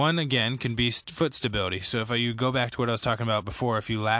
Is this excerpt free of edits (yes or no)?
yes